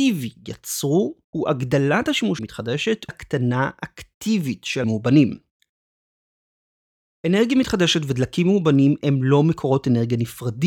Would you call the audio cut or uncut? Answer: cut